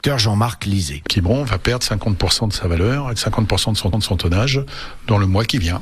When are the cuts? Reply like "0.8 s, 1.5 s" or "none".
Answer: 1.0 s, 3.9 s